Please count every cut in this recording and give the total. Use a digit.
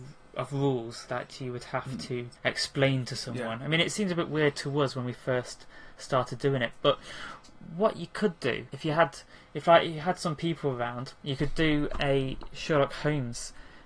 0